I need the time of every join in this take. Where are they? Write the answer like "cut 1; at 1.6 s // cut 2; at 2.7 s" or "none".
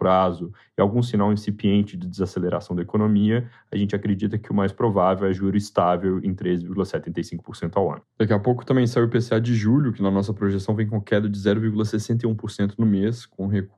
cut 1; at 8.1 s